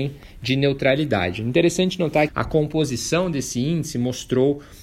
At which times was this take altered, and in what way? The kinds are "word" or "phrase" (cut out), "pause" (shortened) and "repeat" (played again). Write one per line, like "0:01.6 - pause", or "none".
0:02.3 - word